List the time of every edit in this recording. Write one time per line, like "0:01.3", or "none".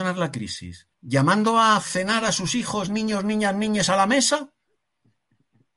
0:00.9